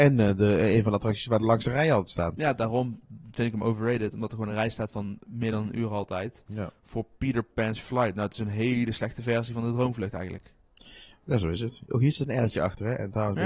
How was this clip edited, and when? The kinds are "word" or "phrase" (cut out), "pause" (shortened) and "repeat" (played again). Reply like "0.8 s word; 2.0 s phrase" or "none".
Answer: none